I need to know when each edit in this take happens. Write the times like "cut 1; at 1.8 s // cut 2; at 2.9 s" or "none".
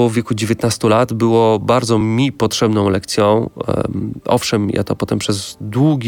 none